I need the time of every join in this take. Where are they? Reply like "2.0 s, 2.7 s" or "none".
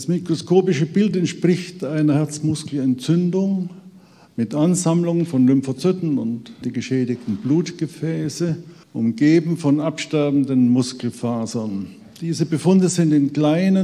6.6 s, 8.8 s